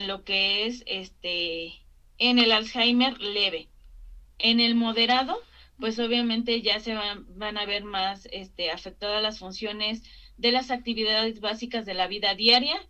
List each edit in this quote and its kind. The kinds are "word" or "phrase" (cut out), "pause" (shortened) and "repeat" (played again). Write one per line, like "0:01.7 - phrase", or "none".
none